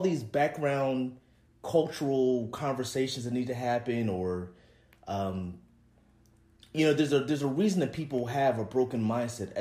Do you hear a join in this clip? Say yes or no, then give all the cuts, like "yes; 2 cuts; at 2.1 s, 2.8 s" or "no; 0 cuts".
no; 0 cuts